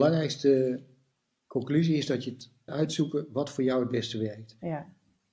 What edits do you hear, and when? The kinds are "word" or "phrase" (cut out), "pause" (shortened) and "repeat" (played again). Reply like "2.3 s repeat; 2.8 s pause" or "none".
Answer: 2.7 s word